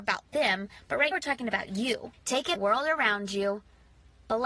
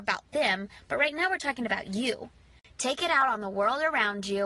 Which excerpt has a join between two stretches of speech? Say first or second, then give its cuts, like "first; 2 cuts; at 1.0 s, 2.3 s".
first; 3 cuts; at 1.1 s, 2.1 s, 2.6 s